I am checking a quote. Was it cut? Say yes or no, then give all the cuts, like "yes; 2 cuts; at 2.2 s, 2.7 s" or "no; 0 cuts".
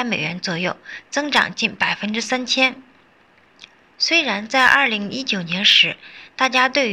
no; 0 cuts